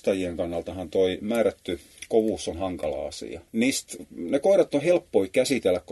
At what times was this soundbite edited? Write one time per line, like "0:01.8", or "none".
0:03.5